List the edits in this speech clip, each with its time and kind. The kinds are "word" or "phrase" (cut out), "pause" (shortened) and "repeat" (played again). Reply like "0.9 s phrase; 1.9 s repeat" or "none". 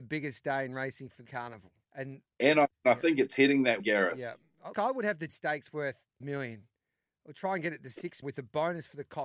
1.3 s word; 1.8 s pause; 2.7 s pause; 3.8 s word; 4.7 s word; 5.3 s word; 6.2 s word; 8.2 s word